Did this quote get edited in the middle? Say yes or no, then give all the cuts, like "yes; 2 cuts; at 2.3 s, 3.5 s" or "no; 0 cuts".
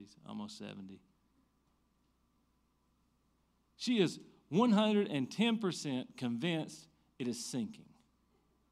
no; 0 cuts